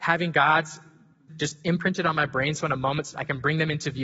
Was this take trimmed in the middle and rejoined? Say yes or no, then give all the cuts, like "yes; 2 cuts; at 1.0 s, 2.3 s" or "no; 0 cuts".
yes; 2 cuts; at 1.3 s, 3.1 s